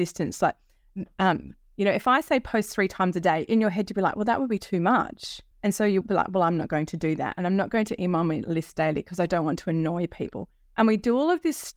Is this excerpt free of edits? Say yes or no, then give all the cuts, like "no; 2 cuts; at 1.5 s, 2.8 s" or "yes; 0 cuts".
no; 2 cuts; at 5.5 s, 6.0 s